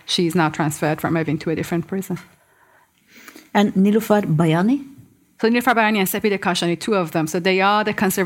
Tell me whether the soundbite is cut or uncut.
uncut